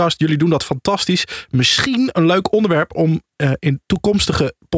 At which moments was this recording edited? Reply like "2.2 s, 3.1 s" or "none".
none